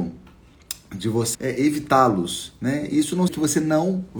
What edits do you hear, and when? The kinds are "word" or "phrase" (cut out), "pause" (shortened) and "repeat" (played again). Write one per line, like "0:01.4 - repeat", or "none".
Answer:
0:01.3 - word
0:03.3 - word